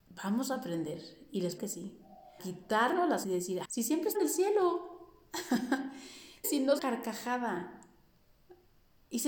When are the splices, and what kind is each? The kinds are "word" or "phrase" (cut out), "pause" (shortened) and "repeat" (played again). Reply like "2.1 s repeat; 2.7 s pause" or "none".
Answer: 1.6 s word; 2.4 s word; 3.2 s word; 3.6 s word; 4.1 s word; 6.4 s word; 6.8 s phrase